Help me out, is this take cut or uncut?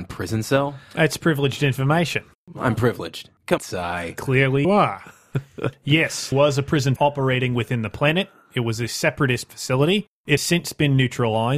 cut